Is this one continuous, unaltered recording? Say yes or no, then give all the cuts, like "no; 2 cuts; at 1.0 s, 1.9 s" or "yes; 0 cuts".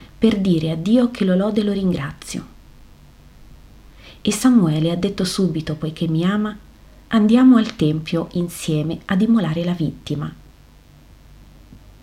yes; 0 cuts